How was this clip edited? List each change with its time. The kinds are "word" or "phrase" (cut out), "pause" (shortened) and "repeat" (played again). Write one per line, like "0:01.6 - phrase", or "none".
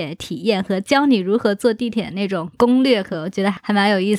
0:03.1 - word